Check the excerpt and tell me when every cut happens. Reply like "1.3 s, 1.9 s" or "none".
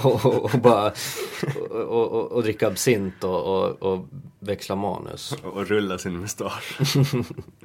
none